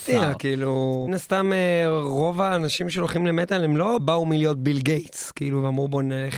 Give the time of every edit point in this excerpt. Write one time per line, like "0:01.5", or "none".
0:01.1
0:04.0